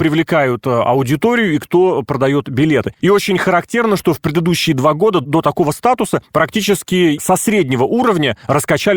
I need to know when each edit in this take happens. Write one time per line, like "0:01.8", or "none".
none